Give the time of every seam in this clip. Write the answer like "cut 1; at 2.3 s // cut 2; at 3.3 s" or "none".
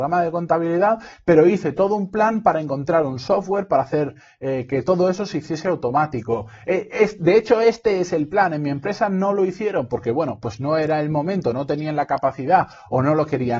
none